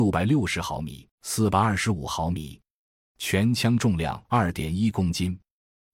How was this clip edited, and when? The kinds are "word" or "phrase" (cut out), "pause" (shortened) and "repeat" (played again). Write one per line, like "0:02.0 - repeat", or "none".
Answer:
0:01.1 - pause
0:04.2 - pause

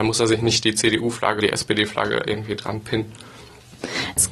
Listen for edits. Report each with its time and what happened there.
0:01.4 - word

